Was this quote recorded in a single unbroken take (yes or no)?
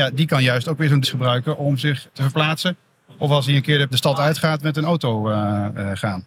no